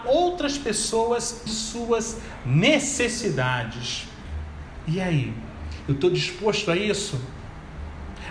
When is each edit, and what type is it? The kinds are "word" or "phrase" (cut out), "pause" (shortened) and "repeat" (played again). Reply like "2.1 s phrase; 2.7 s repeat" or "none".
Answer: 1.5 s word